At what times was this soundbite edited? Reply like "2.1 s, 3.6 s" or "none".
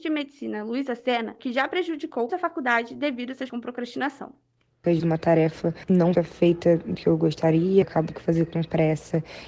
1.4 s, 2.3 s, 3.5 s, 5.0 s, 6.1 s, 6.9 s, 7.8 s, 8.1 s